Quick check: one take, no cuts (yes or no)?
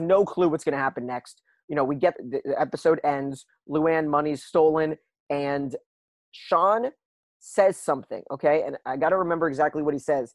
no